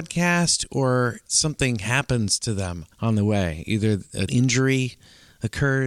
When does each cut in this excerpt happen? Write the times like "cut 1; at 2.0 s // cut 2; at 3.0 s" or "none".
cut 1; at 1.3 s // cut 2; at 2.9 s // cut 3; at 4.3 s